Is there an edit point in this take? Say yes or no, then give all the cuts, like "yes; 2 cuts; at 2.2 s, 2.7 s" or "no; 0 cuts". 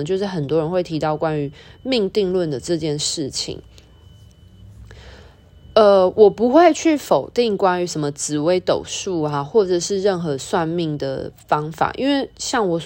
no; 0 cuts